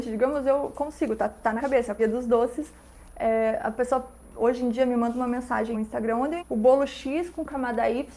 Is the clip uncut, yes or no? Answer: no